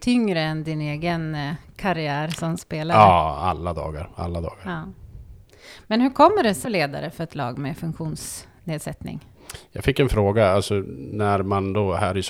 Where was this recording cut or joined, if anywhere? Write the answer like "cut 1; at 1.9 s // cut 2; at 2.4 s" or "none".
cut 1; at 6.6 s